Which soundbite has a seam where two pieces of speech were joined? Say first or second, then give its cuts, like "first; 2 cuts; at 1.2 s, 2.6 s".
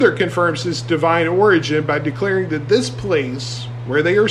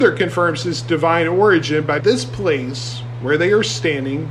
second; 1 cut; at 2.0 s